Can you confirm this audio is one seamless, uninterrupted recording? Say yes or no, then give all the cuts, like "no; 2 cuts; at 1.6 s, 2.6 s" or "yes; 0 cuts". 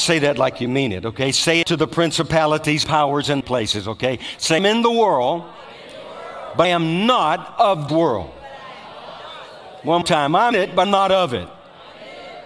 no; 9 cuts; at 1.6 s, 2.8 s, 3.4 s, 4.6 s, 6.6 s, 7.9 s, 10.0 s, 10.5 s, 10.8 s